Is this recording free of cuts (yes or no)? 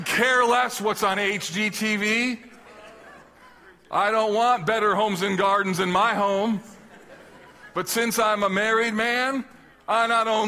yes